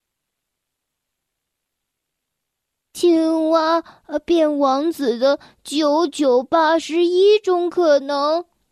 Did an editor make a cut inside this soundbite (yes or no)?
no